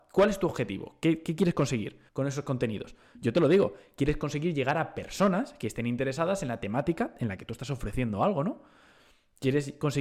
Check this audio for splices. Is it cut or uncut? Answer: cut